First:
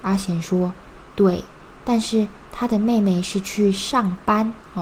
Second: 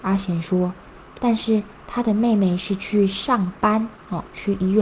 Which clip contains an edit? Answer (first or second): second